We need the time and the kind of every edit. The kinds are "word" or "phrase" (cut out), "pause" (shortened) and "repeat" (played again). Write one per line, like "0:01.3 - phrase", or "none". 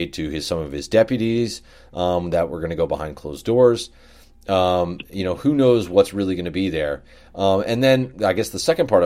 none